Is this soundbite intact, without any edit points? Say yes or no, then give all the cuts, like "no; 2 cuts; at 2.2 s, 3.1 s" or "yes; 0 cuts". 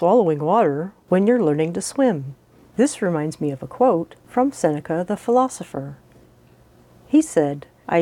no; 1 cut; at 2.5 s